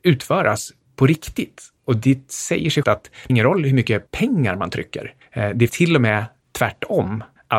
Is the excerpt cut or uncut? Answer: cut